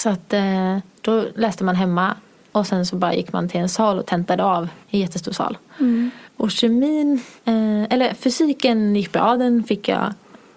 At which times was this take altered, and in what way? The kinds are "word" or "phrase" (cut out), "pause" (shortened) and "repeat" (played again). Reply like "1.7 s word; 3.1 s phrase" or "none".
4.0 s word; 4.8 s pause; 6.3 s pause; 7.4 s pause

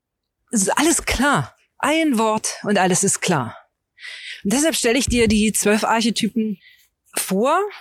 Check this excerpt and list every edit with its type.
none

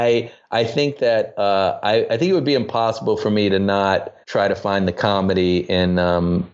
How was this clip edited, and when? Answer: 4.2 s pause

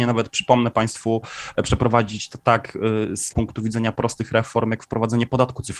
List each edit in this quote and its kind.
3.3 s word

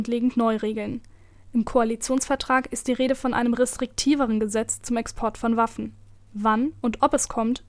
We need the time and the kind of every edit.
none

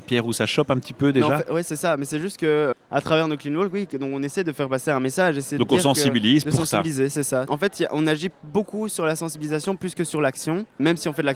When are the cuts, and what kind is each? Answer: none

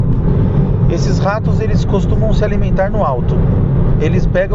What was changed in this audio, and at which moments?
none

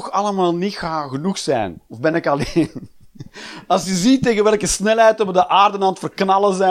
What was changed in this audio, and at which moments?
1.9 s pause

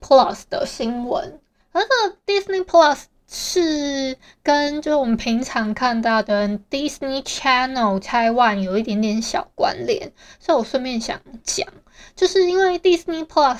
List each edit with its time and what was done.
none

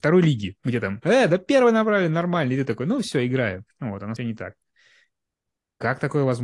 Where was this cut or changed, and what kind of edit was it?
3.7 s pause; 4.2 s phrase

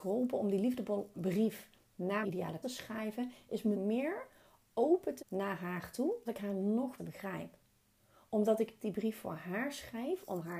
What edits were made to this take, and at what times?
1.1 s word; 2.2 s word; 2.6 s word; 3.7 s word; 5.2 s word; 6.3 s word; 7.0 s word; 8.8 s word

